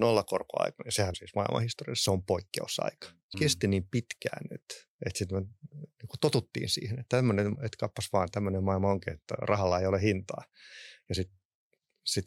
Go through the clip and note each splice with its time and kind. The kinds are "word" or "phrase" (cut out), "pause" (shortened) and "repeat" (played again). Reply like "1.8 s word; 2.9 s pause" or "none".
1.1 s word; 3.3 s word; 7.5 s word